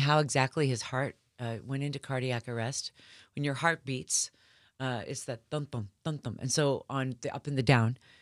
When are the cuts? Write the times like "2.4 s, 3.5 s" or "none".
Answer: none